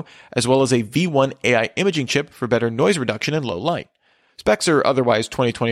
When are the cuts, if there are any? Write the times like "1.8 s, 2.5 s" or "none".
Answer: none